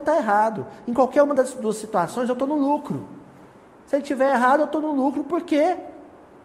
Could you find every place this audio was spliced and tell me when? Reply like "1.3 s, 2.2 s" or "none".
none